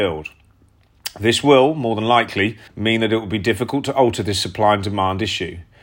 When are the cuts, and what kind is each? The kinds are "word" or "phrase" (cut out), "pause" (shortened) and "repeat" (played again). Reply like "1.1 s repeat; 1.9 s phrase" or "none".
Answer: 2.7 s pause

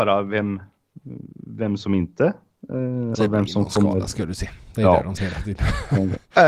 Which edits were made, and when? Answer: 3.1 s word; 5.2 s word

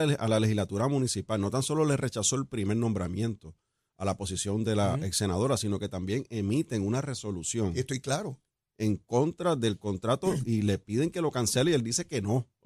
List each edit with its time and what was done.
none

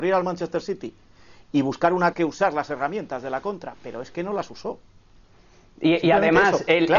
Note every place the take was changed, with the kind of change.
2.1 s phrase

